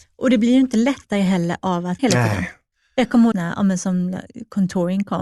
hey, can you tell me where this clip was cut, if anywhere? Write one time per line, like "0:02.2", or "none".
0:02.0
0:02.7
0:03.3